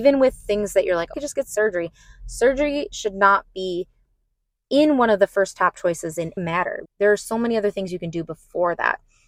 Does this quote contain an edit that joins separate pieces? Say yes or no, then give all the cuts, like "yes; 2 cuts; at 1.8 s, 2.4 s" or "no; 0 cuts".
yes; 3 cuts; at 1.1 s, 6.4 s, 6.8 s